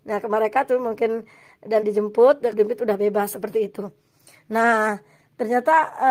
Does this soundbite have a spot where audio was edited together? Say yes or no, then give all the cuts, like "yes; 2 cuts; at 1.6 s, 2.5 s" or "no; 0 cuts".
yes; 2 cuts; at 1.8 s, 2.5 s